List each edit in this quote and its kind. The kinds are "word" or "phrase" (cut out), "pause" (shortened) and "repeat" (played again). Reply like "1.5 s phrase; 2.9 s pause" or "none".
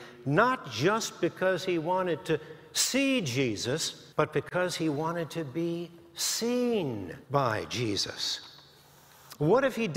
4.1 s pause; 7.2 s pause